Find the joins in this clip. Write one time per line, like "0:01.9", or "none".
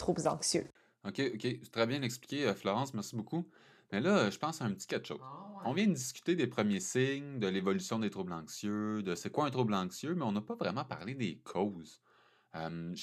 none